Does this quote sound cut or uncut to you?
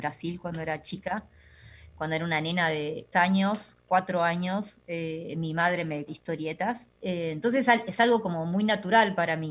cut